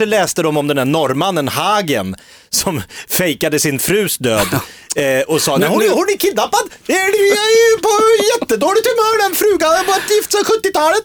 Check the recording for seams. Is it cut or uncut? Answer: uncut